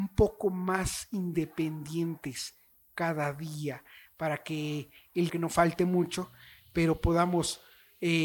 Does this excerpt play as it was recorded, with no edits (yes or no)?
no